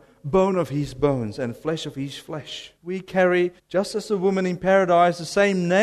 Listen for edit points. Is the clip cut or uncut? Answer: cut